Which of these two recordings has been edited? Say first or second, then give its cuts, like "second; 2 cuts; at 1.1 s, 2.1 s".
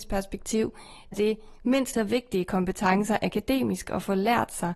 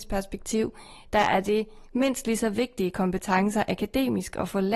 first; 2 cuts; at 1.1 s, 1.9 s